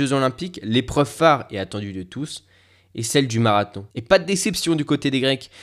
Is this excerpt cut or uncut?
cut